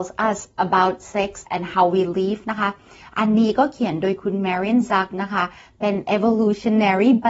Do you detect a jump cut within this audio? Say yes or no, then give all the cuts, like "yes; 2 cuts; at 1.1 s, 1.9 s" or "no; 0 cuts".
yes; 1 cut; at 1.5 s